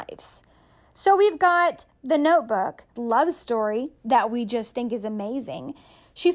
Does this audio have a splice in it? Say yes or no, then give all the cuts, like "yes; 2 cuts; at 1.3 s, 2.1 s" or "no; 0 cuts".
yes; 1 cut; at 3.0 s